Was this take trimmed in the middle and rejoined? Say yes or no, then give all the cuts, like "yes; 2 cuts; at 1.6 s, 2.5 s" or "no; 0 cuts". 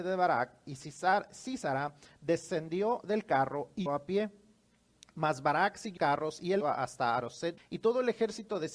yes; 4 cuts; at 3.9 s, 6.0 s, 6.6 s, 7.6 s